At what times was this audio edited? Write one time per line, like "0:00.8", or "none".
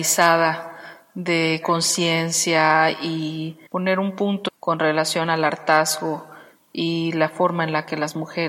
0:01.6
0:03.7
0:04.5